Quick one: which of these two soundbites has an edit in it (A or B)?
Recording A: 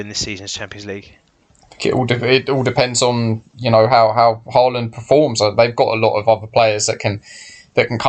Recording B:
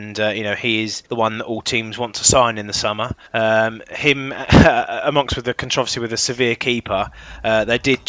B